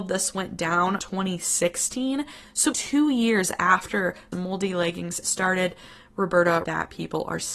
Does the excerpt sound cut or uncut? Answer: cut